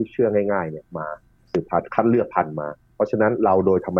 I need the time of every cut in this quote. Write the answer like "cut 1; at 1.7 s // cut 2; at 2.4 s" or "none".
none

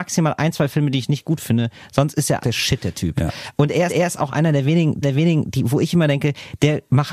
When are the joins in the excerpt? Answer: cut 1; at 2.4 s // cut 2; at 3.9 s // cut 3; at 5.0 s

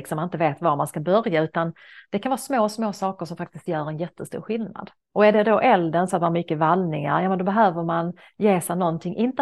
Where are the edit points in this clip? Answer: cut 1; at 5.0 s

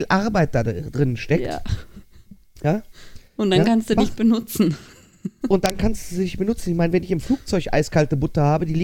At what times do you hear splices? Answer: cut 1; at 3.3 s

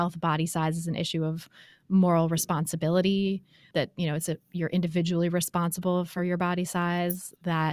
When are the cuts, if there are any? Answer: none

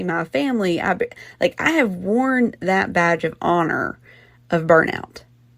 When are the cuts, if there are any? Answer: none

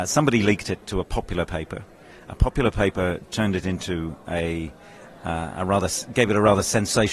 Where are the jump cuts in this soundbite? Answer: none

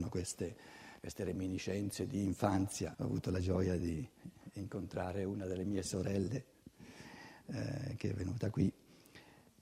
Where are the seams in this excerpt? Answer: cut 1; at 2.9 s // cut 2; at 5.8 s

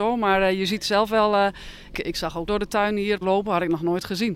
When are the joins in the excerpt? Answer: cut 1; at 1.9 s // cut 2; at 2.5 s // cut 3; at 3.2 s

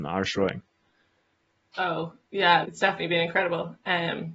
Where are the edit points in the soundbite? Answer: cut 1; at 2.6 s

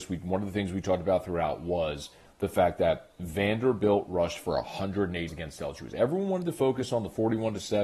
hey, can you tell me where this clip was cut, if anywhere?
cut 1; at 5.3 s

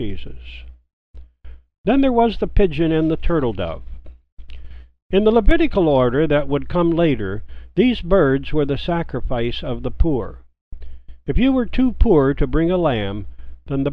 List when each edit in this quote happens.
none

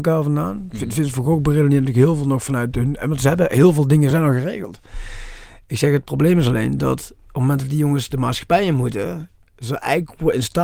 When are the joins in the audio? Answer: none

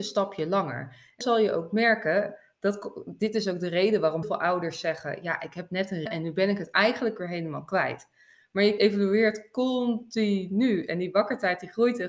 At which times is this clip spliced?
cut 1; at 1.2 s // cut 2; at 4.2 s // cut 3; at 6.1 s // cut 4; at 8.8 s

